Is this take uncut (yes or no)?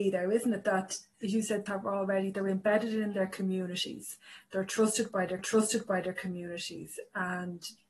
no